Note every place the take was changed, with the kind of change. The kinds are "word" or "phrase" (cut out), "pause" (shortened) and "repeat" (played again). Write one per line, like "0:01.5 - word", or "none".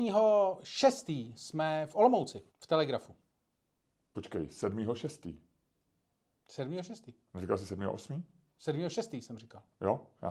0:02.5 - pause
0:03.8 - pause